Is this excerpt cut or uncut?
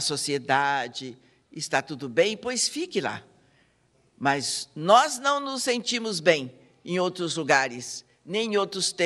uncut